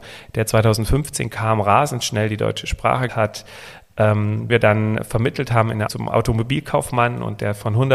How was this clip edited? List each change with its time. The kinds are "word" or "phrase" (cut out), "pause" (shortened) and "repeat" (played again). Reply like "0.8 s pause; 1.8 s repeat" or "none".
3.1 s word; 4.5 s word; 5.9 s word